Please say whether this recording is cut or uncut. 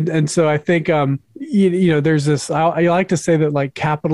cut